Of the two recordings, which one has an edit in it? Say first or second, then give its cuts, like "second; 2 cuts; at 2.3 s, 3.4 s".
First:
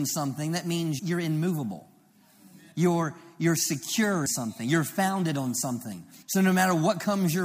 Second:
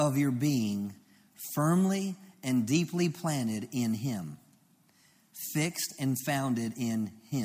first; 4 cuts; at 1.0 s, 2.7 s, 4.3 s, 6.2 s